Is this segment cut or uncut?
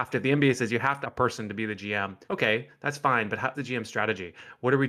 cut